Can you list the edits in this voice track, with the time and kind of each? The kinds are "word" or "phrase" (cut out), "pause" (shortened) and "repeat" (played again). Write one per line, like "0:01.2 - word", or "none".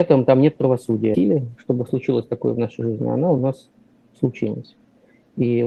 none